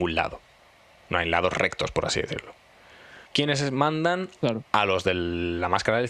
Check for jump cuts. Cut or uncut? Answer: cut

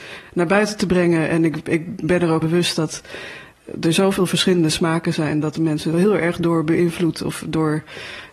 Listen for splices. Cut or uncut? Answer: cut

